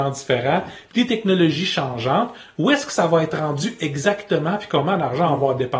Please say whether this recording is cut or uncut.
uncut